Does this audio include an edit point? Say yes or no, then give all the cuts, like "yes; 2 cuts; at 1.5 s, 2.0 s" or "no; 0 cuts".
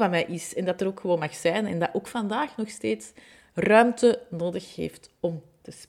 no; 0 cuts